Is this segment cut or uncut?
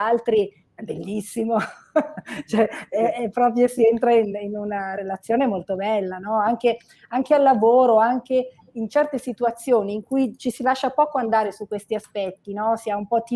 uncut